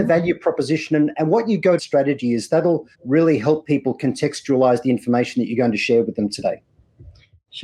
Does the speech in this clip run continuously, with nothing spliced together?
no; 2 cuts; at 1.8 s, 2.9 s

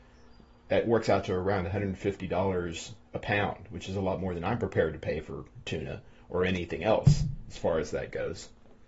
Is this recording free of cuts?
yes; 0 cuts

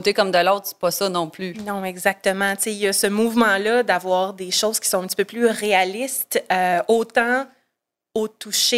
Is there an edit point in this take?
no; 0 cuts

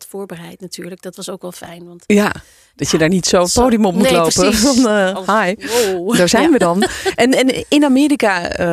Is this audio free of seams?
yes; 0 cuts

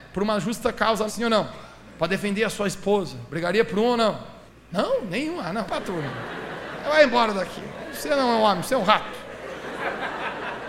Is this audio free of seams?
no; 3 cuts; at 1.1 s, 4.5 s, 5.7 s

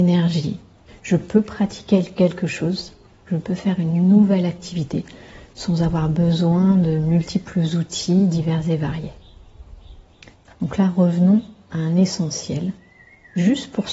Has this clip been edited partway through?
no; 0 cuts

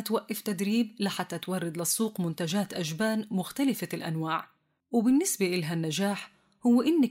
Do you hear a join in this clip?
no; 0 cuts

